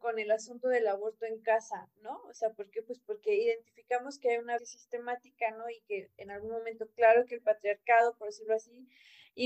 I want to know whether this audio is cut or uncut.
cut